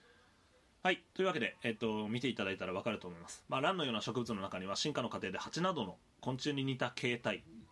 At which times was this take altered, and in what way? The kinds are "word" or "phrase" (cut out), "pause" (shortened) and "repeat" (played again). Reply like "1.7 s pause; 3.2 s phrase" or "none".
1.1 s pause